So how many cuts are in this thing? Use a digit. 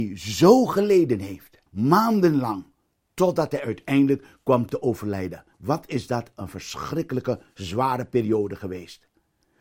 2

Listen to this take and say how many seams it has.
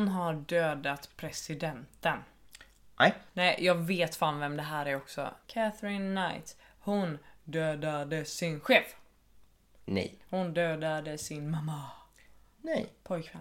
2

